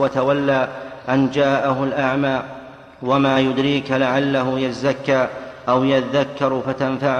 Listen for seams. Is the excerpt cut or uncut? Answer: uncut